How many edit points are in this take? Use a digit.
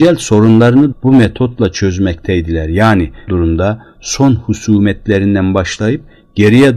2